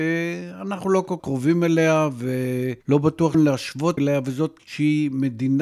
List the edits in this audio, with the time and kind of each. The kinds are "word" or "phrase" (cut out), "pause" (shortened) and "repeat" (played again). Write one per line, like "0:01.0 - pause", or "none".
0:01.2 - word
0:02.8 - pause
0:03.3 - word
0:04.0 - phrase
0:04.6 - word